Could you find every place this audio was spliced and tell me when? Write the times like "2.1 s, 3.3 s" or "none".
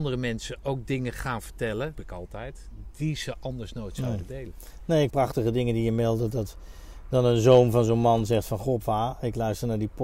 1.9 s, 5.1 s